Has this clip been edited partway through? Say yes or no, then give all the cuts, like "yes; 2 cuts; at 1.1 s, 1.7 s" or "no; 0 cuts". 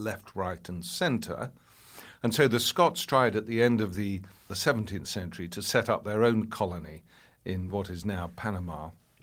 no; 0 cuts